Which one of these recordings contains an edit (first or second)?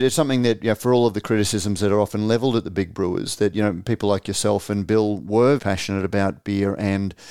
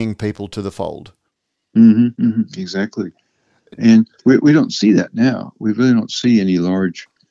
first